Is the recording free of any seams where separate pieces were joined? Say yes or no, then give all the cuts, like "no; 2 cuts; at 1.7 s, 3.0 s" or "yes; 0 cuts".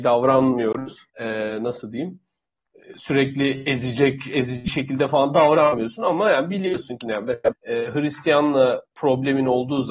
no; 3 cuts; at 1.1 s, 7.0 s, 7.5 s